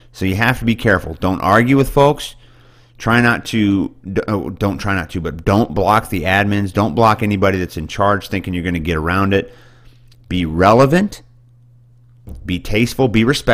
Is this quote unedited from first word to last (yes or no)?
yes